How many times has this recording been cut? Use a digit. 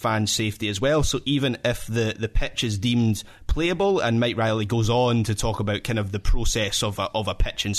0